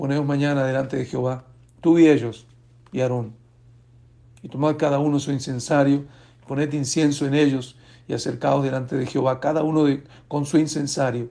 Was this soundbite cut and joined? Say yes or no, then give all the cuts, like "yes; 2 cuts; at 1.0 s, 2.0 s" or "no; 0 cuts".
no; 0 cuts